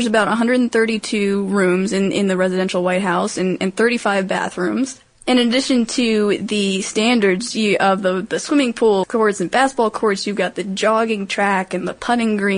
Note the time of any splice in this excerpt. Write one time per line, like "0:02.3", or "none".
0:09.0